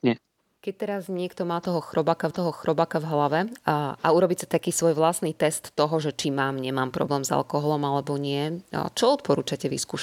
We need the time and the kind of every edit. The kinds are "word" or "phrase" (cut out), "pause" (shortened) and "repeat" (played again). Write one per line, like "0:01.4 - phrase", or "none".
0:02.3 - repeat